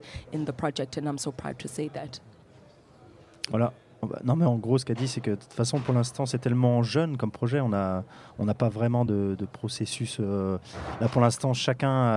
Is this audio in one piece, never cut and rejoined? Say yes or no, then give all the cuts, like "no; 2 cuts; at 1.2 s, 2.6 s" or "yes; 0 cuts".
yes; 0 cuts